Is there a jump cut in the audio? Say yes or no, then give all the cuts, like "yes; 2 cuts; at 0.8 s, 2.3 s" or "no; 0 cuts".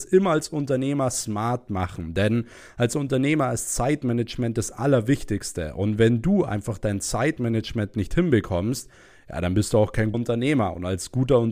yes; 1 cut; at 10.1 s